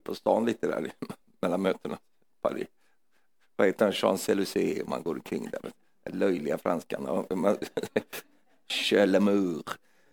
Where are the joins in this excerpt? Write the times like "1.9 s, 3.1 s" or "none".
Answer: none